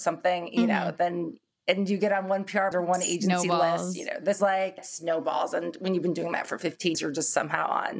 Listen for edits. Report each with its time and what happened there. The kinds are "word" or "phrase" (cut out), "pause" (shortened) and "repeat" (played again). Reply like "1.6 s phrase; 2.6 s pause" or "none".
2.7 s word; 4.4 s word; 4.8 s word; 6.9 s word